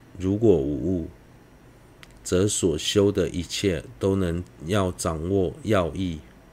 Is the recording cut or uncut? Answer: cut